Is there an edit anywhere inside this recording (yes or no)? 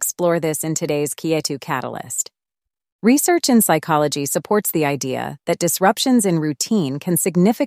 no